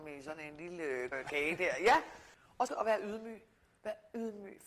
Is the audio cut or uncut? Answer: cut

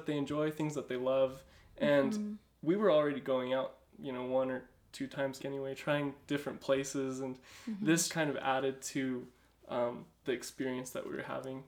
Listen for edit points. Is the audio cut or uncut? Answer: cut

